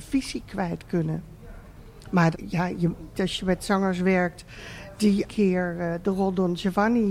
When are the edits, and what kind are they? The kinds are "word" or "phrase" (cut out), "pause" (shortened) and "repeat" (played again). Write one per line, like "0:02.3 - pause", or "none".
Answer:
0:02.3 - word
0:03.1 - phrase
0:05.3 - phrase

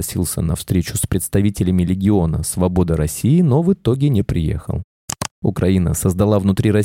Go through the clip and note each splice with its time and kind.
0:05.3 - pause

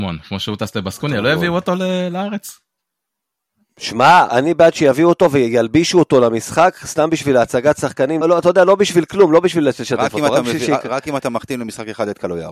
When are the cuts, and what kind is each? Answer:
0:04.3 - word
0:08.2 - word

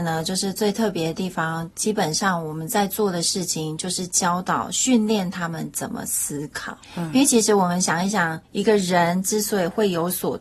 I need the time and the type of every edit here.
0:06.8 - pause
0:08.4 - pause

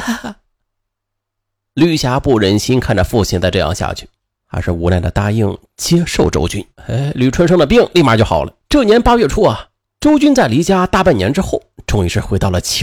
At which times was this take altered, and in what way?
0:06.7 - pause
0:08.6 - pause

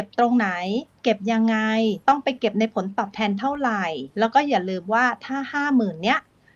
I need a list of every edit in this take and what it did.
0:02.0 - pause
0:04.1 - pause

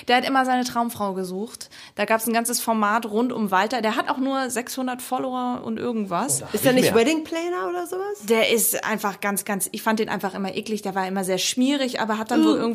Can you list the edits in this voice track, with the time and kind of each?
none

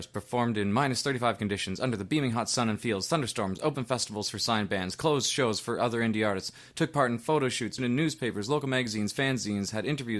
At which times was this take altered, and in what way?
0:07.8 - word

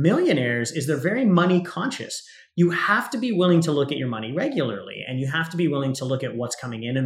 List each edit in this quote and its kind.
none

